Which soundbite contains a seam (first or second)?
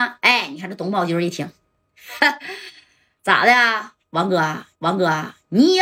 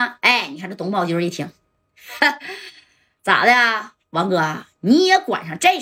first